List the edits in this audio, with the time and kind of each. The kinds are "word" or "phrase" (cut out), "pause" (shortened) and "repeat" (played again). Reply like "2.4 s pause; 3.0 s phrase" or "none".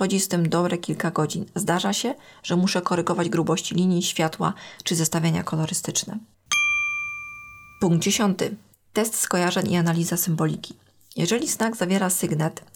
none

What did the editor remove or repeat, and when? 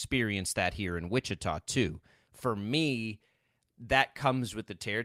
none

